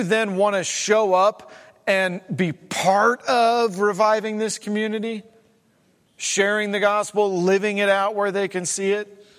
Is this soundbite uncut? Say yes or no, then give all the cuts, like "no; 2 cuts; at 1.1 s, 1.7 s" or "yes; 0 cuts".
yes; 0 cuts